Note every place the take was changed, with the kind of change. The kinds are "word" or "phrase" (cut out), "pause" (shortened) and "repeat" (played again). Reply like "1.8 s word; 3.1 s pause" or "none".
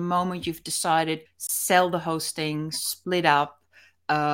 1.3 s word